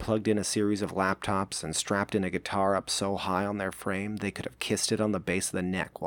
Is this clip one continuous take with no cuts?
yes; 0 cuts

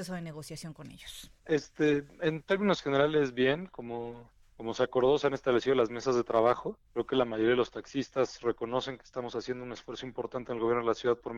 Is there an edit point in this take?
yes; 3 cuts; at 1.4 s, 4.4 s, 6.8 s

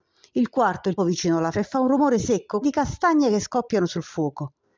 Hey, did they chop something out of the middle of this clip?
yes; 3 cuts; at 1.0 s, 1.5 s, 2.6 s

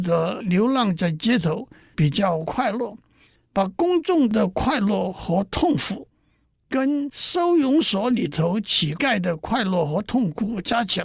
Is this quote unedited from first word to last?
yes; 0 cuts

